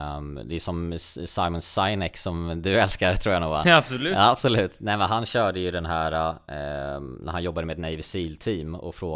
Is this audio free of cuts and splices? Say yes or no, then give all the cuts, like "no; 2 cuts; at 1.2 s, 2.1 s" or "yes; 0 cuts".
yes; 0 cuts